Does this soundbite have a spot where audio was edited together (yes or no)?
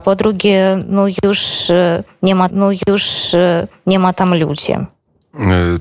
yes